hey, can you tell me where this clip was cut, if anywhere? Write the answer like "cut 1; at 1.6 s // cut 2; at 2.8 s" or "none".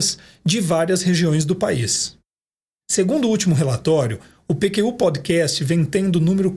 none